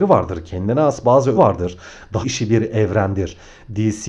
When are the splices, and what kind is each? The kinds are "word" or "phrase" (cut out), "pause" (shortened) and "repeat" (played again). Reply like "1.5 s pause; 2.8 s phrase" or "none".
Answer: 1.4 s phrase; 2.2 s word